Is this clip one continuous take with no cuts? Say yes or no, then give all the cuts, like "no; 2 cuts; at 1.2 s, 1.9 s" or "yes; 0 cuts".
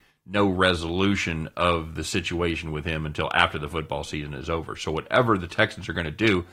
yes; 0 cuts